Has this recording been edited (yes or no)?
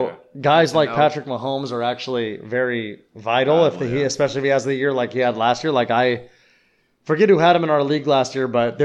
no